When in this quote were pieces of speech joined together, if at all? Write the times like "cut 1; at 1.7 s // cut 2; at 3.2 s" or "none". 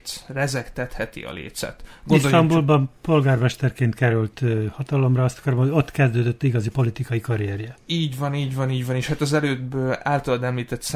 none